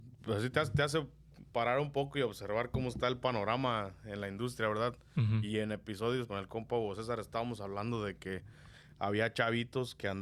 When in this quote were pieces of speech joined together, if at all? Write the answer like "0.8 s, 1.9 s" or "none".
6.3 s